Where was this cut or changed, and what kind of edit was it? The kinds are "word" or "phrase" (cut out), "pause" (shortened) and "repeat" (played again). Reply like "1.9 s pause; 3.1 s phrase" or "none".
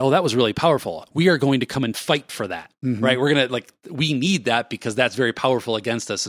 none